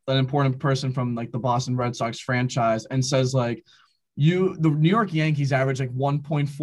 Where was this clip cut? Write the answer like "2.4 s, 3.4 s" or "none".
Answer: none